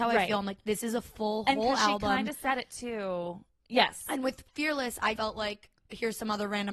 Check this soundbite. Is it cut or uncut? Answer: cut